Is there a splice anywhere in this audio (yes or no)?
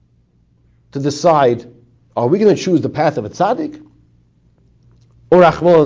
no